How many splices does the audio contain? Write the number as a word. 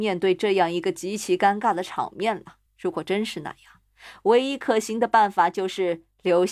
one